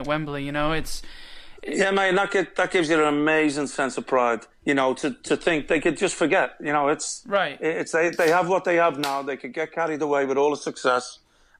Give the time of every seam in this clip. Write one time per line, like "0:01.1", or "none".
0:04.5